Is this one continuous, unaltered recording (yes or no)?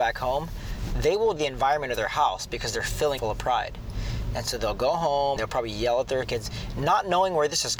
no